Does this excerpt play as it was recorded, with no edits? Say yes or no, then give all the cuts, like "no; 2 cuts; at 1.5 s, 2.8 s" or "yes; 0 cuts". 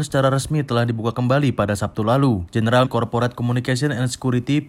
no; 1 cut; at 2.8 s